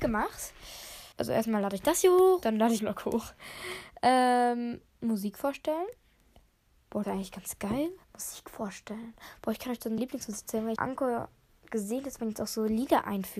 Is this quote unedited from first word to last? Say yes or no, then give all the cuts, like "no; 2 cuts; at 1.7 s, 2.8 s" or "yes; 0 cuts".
no; 8 cuts; at 1.1 s, 2.4 s, 2.8 s, 4.9 s, 7.0 s, 8.0 s, 10.0 s, 10.8 s